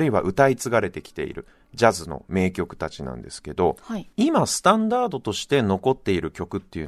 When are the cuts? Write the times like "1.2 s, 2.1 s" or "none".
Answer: 4.1 s